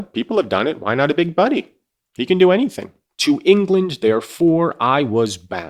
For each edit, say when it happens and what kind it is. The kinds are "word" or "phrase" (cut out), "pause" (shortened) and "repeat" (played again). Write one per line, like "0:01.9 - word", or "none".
none